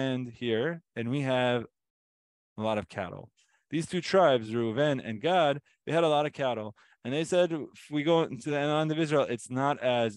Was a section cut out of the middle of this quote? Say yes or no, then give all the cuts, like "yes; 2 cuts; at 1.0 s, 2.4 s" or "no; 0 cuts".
no; 0 cuts